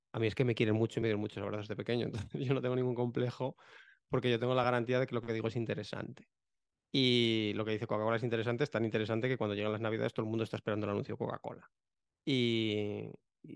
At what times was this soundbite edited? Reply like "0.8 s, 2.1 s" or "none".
none